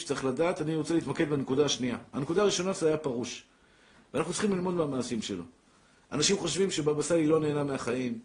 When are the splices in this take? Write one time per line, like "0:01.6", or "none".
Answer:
none